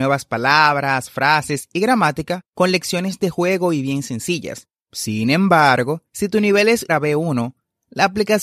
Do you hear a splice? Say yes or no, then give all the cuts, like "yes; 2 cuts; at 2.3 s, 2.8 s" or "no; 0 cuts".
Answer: yes; 4 cuts; at 2.5 s, 4.8 s, 6.1 s, 6.9 s